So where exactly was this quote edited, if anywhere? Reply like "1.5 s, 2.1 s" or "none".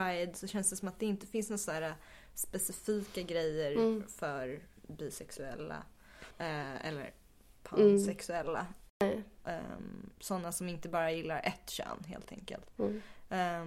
6.3 s, 10.1 s